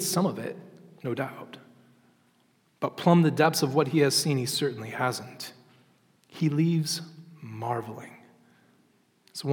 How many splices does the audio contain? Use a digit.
0